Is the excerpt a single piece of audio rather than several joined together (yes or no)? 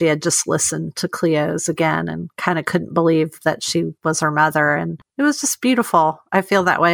no